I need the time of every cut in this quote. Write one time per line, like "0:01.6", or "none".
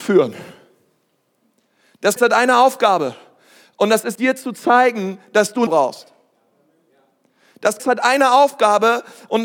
0:02.2
0:04.1
0:05.7
0:07.8